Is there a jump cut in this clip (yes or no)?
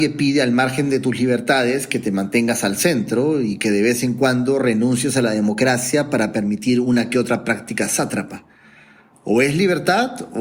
no